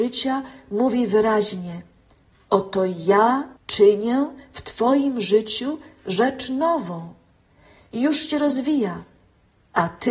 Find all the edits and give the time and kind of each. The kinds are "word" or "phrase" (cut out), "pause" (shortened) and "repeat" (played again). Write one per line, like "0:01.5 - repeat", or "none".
0:03.6 - pause